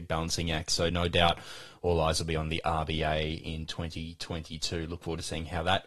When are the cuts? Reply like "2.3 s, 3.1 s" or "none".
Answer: none